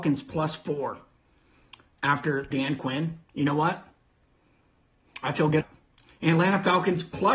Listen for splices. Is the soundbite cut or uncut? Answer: cut